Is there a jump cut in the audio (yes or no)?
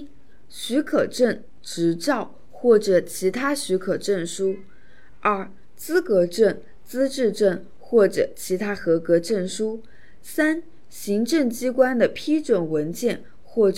no